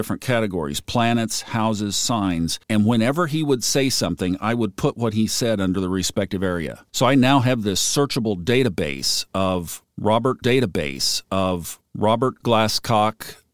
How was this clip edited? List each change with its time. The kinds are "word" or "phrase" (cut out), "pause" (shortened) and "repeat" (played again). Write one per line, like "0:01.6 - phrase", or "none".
0:02.6 - pause
0:06.9 - pause
0:10.4 - repeat